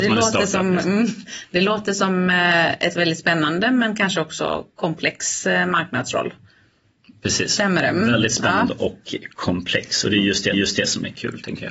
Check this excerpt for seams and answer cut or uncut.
cut